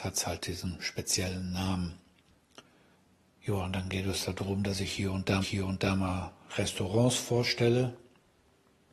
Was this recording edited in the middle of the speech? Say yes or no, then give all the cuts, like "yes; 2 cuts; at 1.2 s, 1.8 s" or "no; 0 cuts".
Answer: yes; 2 cuts; at 2.9 s, 5.4 s